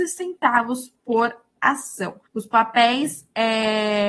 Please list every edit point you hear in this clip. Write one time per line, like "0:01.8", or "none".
0:02.3

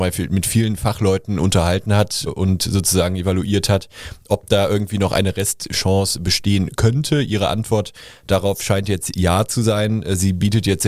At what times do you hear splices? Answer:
0:02.3

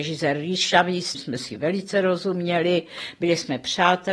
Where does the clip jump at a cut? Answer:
0:01.1

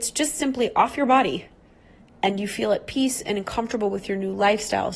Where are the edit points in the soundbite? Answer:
none

